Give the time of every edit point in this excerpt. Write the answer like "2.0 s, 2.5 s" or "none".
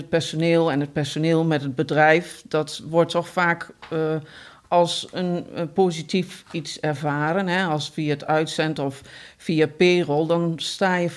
none